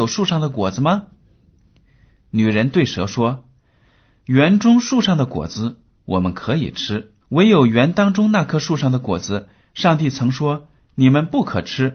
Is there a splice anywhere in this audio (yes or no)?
yes